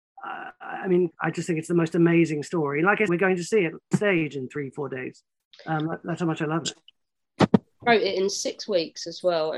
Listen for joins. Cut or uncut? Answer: cut